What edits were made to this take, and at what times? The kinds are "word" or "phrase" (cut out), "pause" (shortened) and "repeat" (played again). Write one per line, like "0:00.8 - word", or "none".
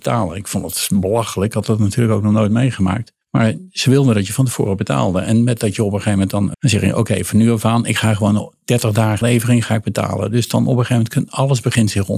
0:03.2 - pause
0:06.5 - phrase
0:09.2 - word